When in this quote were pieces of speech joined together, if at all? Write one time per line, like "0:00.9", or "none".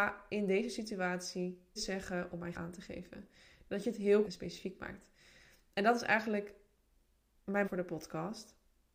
0:01.8
0:02.5
0:04.2
0:07.6